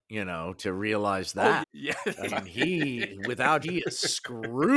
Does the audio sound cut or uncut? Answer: cut